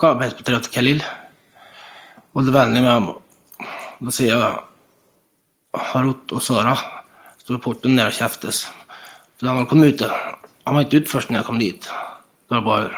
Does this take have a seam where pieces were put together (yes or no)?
no